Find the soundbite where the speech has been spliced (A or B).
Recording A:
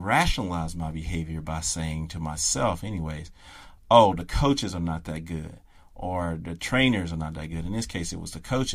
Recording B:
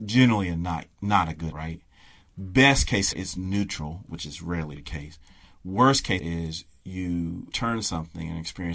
B